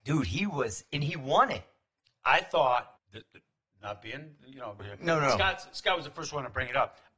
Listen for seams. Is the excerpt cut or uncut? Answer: cut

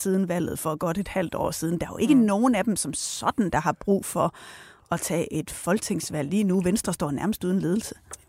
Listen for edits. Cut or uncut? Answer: uncut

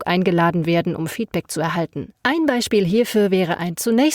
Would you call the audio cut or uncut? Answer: cut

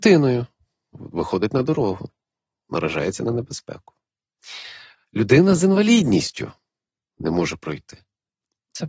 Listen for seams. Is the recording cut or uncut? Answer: uncut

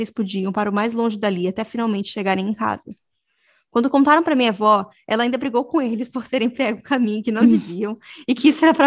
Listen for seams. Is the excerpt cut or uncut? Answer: uncut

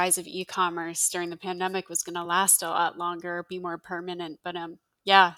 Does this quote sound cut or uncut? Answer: uncut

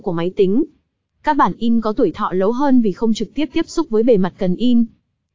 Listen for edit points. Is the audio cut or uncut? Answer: uncut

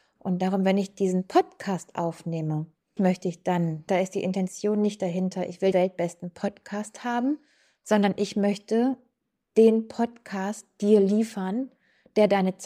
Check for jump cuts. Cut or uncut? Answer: cut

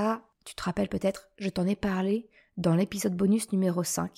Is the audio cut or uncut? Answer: uncut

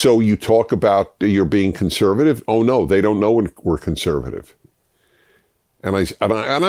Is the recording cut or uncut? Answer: uncut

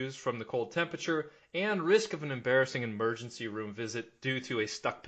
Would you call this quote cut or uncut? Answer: uncut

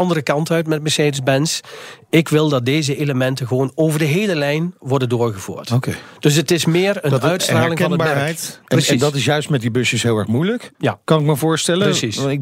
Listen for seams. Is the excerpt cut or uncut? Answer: cut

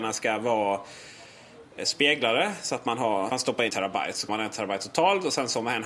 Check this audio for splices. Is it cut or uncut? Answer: cut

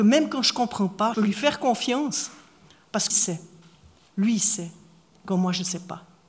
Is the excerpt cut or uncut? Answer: cut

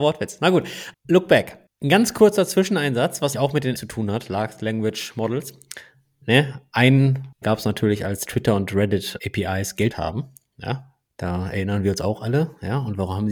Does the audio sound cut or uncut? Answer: cut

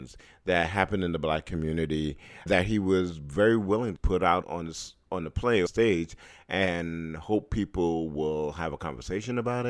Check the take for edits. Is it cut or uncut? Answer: cut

